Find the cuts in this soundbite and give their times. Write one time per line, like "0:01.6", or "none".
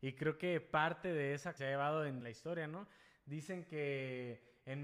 0:01.6
0:02.2